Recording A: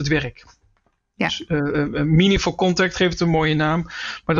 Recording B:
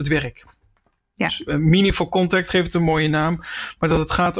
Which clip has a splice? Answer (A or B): B